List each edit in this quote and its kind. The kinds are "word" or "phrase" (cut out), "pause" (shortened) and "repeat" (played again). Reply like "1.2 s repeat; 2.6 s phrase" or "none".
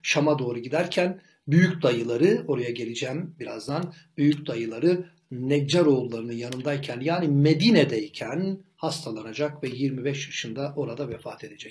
none